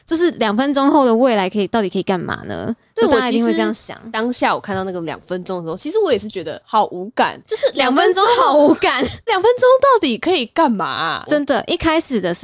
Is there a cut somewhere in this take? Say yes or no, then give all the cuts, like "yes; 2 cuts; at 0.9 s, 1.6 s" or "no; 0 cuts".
yes; 1 cut; at 9.3 s